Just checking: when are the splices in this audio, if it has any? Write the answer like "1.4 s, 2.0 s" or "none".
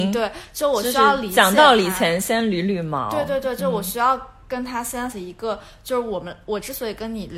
5.1 s